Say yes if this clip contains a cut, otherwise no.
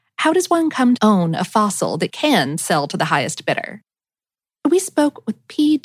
yes